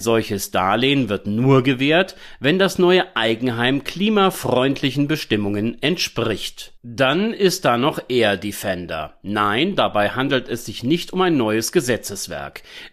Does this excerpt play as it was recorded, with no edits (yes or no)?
no